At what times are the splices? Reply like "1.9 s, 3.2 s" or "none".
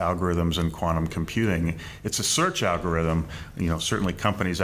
none

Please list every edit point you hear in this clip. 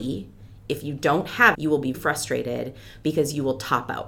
1.5 s, 1.9 s

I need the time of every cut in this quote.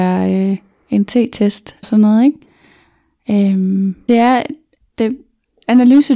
1.8 s, 4.1 s, 4.9 s

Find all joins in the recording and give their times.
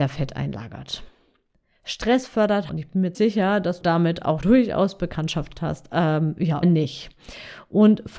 2.7 s, 3.1 s, 3.8 s, 4.4 s, 5.5 s, 6.6 s

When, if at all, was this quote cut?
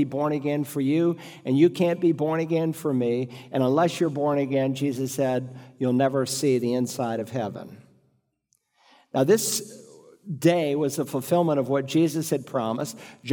none

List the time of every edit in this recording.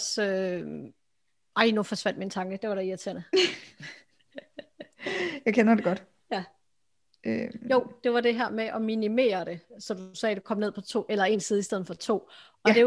none

